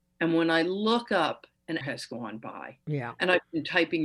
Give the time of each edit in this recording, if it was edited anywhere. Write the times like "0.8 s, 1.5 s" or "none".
1.8 s